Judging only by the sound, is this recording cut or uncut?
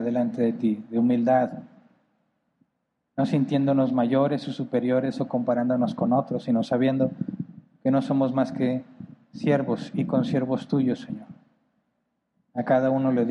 uncut